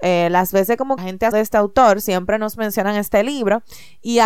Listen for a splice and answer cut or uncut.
cut